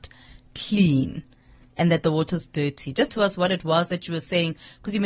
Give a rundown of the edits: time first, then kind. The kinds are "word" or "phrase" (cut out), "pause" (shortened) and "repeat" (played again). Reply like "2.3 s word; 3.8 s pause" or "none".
3.1 s word